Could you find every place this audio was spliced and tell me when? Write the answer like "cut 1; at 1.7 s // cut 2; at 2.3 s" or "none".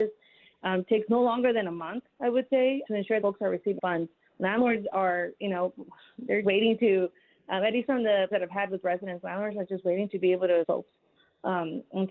cut 1; at 2.9 s // cut 2; at 3.2 s // cut 3; at 3.8 s // cut 4; at 6.4 s // cut 5; at 8.3 s // cut 6; at 10.6 s